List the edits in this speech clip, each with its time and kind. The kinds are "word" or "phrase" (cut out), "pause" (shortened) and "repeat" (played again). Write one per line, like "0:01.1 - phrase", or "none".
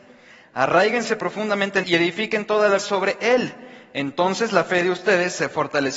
0:01.8 - word
0:02.8 - word